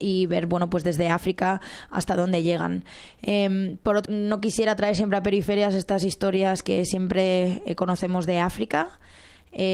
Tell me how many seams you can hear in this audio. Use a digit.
1